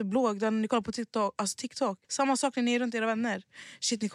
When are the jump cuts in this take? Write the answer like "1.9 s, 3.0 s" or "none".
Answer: 2.0 s